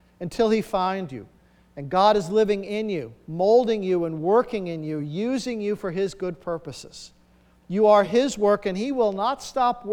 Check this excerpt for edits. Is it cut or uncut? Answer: uncut